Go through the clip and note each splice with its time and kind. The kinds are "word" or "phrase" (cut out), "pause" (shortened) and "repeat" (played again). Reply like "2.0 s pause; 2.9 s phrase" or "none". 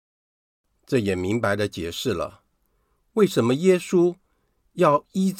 none